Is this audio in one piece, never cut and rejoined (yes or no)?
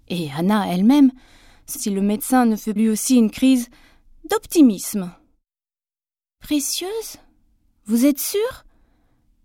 no